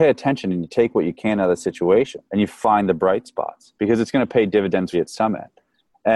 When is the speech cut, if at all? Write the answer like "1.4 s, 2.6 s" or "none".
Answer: 2.3 s, 3.8 s, 4.9 s